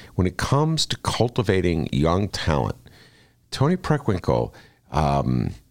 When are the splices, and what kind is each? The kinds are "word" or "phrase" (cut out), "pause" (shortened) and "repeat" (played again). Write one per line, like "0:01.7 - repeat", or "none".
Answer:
0:02.3 - word